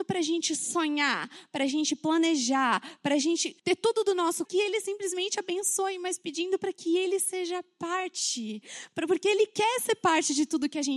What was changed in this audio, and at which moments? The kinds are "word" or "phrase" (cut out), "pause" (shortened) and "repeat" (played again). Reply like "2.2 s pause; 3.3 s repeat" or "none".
3.6 s pause; 4.4 s phrase